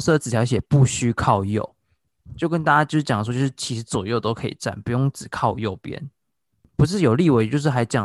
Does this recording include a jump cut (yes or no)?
no